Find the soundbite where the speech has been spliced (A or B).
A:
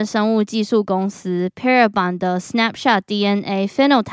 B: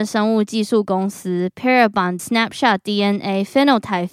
B